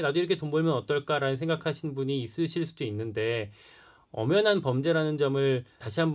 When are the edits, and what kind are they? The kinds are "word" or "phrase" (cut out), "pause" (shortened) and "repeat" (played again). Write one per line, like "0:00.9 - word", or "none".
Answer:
none